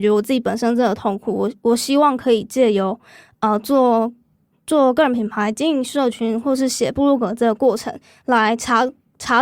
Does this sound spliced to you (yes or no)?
no